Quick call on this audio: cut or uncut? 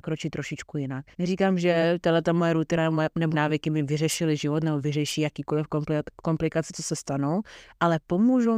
cut